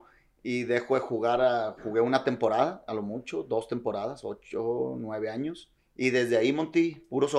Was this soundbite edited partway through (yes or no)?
yes